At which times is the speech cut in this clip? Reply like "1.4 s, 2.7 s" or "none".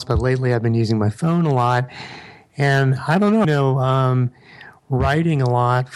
3.4 s